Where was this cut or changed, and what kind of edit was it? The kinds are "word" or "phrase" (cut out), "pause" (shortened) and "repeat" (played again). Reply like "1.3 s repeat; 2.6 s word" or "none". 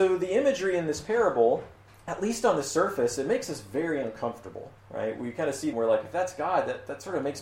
1.8 s pause; 4.8 s pause; 5.7 s phrase